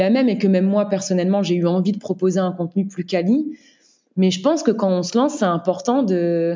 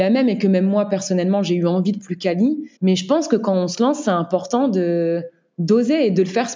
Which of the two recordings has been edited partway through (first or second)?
second